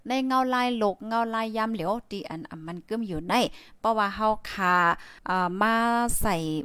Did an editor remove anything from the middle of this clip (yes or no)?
yes